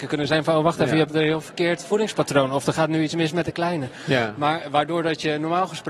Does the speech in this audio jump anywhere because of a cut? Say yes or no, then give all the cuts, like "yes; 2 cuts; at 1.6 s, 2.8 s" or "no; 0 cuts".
no; 0 cuts